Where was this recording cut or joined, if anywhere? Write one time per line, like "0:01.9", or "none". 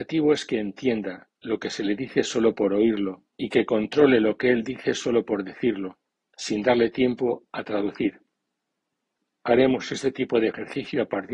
0:03.3
0:06.1